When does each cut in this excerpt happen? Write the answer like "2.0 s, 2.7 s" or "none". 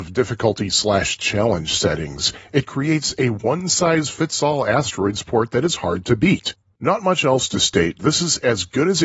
none